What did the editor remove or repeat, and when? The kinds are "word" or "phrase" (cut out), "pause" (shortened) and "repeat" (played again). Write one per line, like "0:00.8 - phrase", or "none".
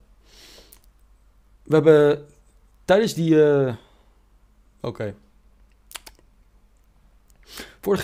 none